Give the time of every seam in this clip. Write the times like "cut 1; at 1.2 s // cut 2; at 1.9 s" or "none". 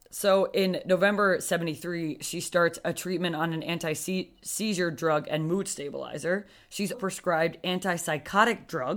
cut 1; at 6.9 s

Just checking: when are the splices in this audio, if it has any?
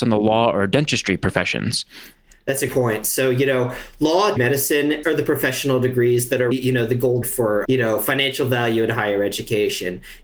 cut 1; at 2.7 s // cut 2; at 4.4 s // cut 3; at 5.0 s // cut 4; at 6.5 s // cut 5; at 7.2 s // cut 6; at 7.7 s

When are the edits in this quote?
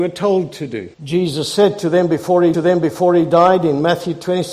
cut 1; at 0.9 s // cut 2; at 2.5 s

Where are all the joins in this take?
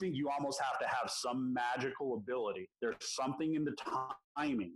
cut 1; at 2.7 s

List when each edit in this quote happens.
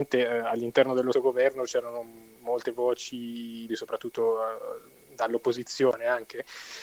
cut 1; at 1.1 s // cut 2; at 2.4 s // cut 3; at 3.7 s // cut 4; at 5.0 s

